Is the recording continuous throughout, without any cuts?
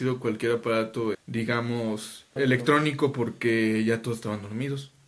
no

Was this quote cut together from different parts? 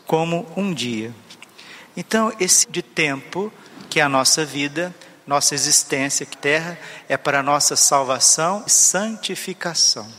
yes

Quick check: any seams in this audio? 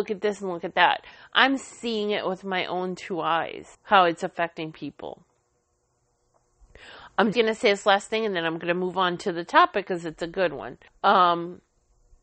yes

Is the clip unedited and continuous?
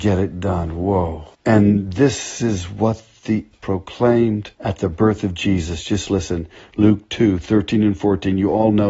no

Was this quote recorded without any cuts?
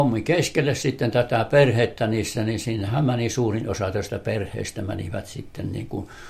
yes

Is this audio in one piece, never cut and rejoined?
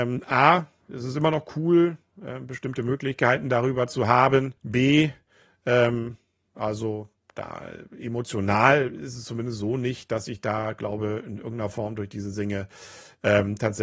no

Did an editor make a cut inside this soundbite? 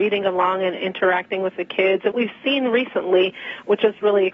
yes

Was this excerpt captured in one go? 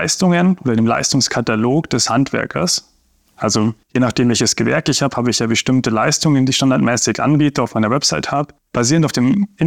no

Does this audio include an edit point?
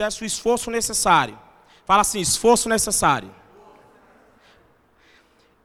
no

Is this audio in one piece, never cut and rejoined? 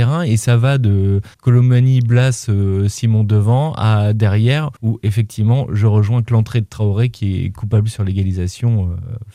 no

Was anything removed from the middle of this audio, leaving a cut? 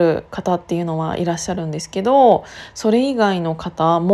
no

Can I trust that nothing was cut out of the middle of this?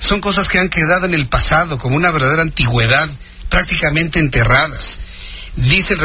yes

